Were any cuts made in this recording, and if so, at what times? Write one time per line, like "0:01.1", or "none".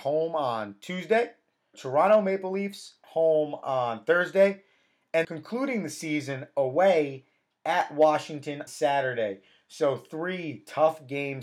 0:01.7
0:03.0
0:05.2
0:08.7